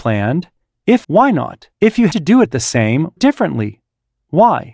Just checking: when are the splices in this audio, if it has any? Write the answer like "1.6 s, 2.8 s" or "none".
1.0 s, 1.7 s, 2.1 s, 2.4 s, 3.2 s